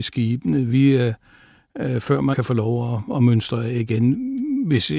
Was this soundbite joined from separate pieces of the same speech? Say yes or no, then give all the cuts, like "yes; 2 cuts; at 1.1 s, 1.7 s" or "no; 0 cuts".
yes; 2 cuts; at 2.3 s, 3.1 s